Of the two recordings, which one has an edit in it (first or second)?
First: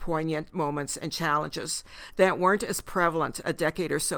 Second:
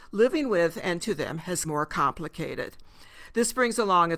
second